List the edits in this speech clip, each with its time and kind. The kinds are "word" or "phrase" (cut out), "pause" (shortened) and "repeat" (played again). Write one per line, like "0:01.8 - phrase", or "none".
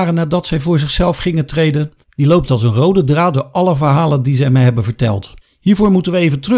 0:02.0 - pause
0:05.4 - pause